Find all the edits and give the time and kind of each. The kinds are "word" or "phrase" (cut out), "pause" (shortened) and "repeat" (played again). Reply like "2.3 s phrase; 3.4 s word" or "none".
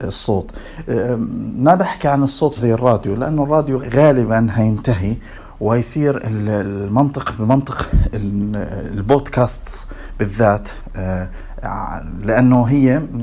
2.6 s phrase; 3.8 s word